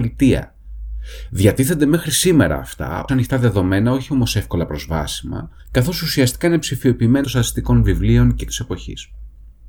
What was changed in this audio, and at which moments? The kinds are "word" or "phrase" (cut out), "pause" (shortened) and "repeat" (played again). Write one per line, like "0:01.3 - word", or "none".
0:03.1 - word
0:05.6 - pause
0:07.2 - word
0:08.5 - word